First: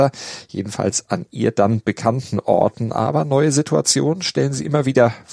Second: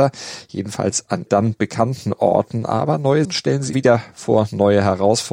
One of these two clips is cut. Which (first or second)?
second